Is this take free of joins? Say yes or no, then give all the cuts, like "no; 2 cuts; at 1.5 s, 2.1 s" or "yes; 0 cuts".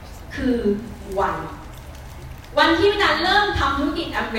yes; 0 cuts